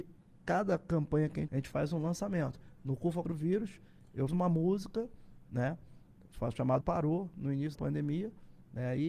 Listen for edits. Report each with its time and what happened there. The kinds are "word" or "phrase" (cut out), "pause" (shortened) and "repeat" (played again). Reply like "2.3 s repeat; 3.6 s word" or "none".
1.5 s word; 3.2 s word; 4.3 s word; 6.8 s word; 7.7 s word